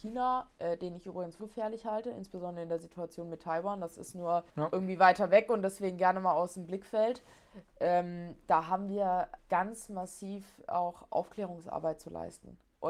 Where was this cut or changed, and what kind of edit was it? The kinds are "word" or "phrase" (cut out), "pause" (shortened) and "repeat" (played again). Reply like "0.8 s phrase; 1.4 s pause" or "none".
1.4 s word; 4.5 s pause; 9.4 s word